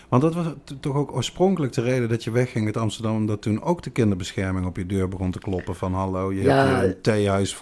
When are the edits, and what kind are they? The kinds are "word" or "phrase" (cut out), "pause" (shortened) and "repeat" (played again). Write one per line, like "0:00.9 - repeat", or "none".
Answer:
none